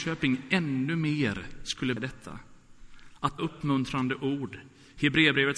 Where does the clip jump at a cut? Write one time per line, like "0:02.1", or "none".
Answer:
0:02.0
0:03.4

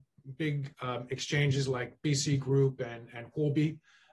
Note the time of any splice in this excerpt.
none

